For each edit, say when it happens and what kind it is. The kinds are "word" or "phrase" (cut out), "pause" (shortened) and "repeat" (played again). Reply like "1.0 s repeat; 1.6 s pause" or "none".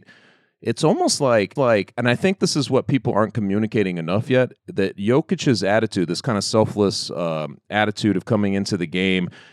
1.6 s repeat; 4.6 s pause